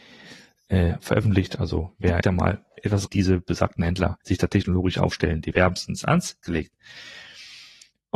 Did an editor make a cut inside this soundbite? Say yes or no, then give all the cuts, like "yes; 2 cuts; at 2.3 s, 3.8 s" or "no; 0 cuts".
yes; 5 cuts; at 2.2 s, 3.1 s, 4.2 s, 5.5 s, 6.4 s